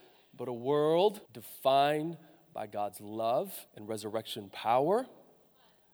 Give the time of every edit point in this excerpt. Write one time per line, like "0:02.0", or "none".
0:01.3
0:03.7